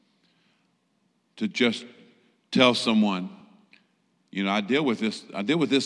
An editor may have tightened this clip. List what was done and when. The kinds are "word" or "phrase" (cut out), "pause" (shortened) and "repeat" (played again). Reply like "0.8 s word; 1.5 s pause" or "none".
none